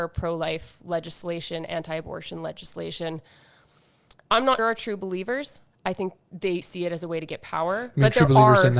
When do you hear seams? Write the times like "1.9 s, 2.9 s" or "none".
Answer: 4.6 s, 6.6 s